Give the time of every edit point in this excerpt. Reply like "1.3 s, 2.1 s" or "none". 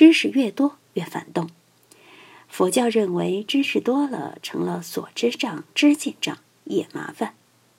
none